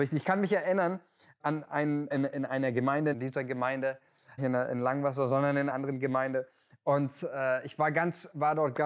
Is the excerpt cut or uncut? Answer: cut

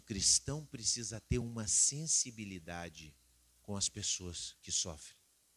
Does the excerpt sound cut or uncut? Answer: uncut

